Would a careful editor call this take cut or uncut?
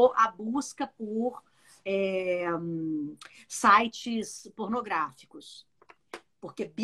uncut